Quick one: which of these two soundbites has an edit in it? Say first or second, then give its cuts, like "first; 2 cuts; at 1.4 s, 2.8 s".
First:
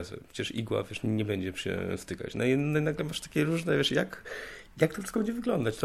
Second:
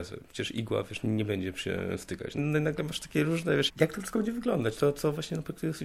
second; 2 cuts; at 2.4 s, 3.7 s